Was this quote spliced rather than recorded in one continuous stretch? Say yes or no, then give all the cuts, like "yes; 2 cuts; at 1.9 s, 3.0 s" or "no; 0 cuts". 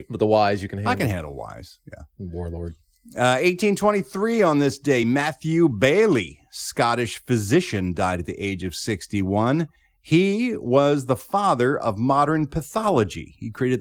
no; 0 cuts